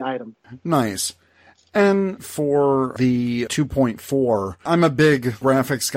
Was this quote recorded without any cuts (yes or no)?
no